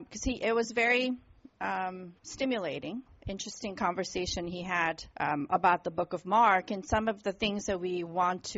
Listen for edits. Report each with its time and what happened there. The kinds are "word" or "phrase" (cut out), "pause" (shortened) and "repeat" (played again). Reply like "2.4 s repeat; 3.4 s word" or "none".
2.2 s pause; 5.1 s pause